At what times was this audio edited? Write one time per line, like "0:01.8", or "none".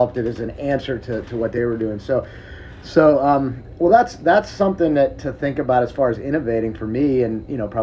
none

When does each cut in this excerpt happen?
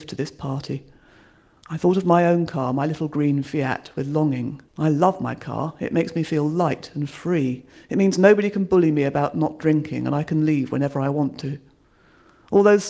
0:04.7

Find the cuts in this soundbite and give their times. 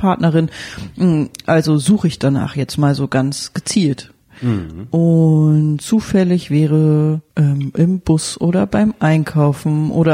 0:07.3

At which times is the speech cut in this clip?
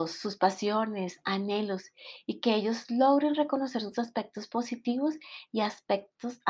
none

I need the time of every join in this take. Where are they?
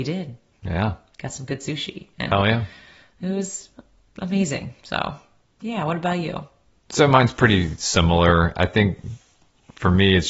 none

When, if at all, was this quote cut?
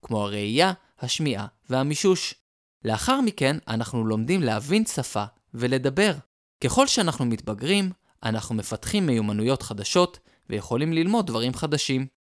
none

